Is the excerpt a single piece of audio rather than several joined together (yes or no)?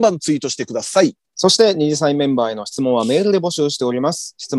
no